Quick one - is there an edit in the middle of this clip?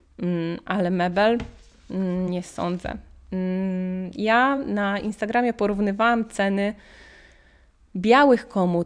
no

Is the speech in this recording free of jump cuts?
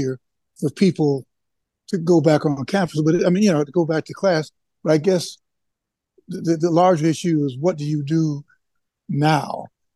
yes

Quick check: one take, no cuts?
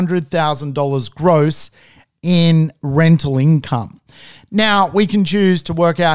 yes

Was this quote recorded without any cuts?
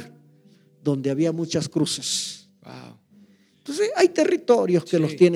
yes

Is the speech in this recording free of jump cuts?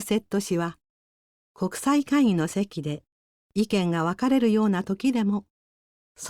yes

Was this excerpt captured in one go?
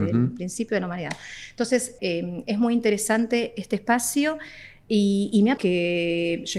no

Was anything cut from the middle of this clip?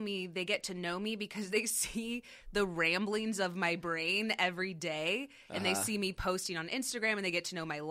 no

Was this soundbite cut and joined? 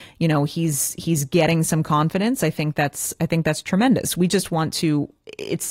no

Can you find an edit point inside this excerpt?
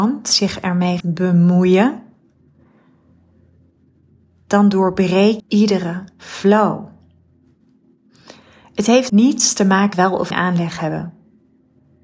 yes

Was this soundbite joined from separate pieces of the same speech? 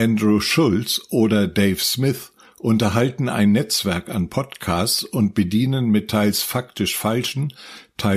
no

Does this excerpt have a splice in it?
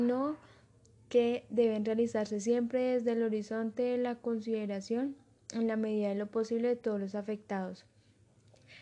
no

